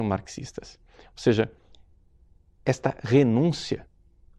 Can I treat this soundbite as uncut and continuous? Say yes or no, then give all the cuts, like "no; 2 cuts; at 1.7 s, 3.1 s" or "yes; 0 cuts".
yes; 0 cuts